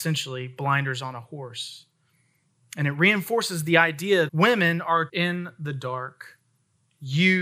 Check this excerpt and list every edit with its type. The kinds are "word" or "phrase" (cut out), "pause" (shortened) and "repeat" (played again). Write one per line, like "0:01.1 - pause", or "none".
0:04.3 - word
0:05.1 - phrase